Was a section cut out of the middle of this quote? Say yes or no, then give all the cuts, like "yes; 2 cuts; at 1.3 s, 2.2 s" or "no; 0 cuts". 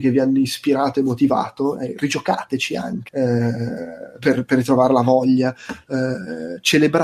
yes; 1 cut; at 3.1 s